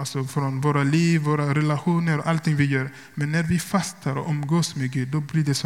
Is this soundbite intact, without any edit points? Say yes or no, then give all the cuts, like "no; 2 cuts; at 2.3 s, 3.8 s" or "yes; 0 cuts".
yes; 0 cuts